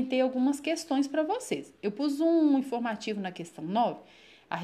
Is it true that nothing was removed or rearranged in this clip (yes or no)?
yes